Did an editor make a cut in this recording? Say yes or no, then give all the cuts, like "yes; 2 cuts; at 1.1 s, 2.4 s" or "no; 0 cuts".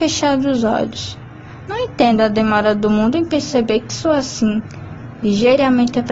no; 0 cuts